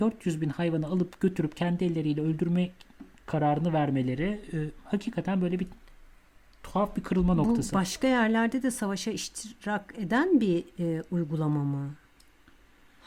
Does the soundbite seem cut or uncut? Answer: uncut